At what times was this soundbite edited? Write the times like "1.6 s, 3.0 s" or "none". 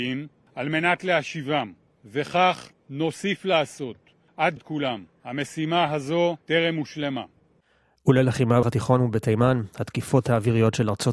2.8 s, 4.6 s, 6.4 s, 8.6 s

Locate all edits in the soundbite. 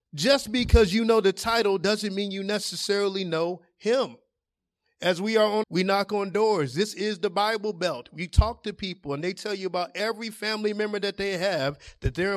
5.6 s

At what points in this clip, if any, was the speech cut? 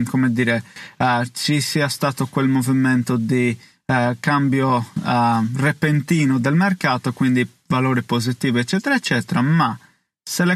none

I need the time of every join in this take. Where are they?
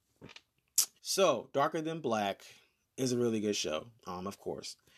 1.0 s, 2.8 s, 4.0 s

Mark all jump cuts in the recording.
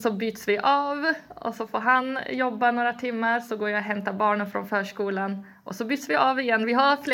none

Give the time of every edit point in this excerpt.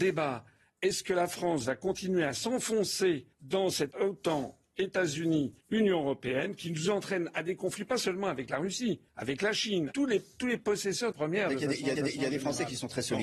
3.3 s, 3.9 s, 5.6 s, 9.1 s, 9.9 s, 10.6 s, 11.1 s, 12.0 s

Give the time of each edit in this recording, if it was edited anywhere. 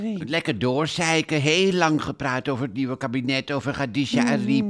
none

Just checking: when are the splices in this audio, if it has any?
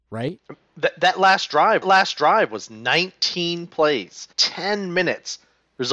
1.8 s, 4.3 s

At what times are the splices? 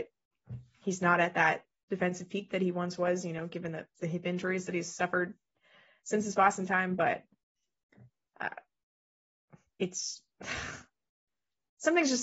none

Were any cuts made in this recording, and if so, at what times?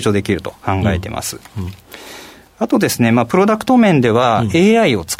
none

